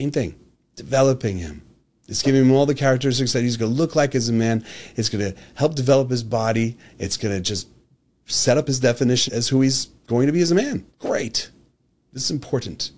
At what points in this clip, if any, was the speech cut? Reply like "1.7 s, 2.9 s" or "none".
9.3 s, 10.9 s